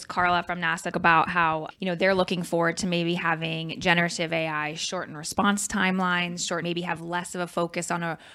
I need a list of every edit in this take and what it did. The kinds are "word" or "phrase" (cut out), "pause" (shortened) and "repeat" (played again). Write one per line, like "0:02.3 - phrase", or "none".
0:00.9 - word
0:01.7 - word
0:06.6 - word